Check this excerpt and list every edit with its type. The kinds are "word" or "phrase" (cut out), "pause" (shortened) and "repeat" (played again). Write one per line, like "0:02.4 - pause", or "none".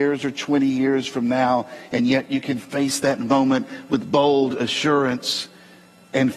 none